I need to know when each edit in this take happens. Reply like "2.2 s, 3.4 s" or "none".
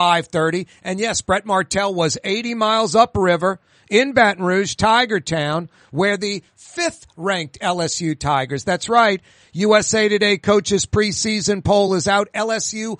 none